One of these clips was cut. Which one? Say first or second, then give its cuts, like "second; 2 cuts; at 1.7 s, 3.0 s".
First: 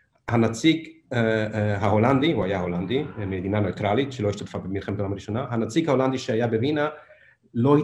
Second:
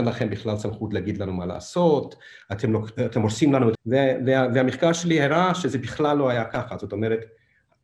second; 1 cut; at 3.7 s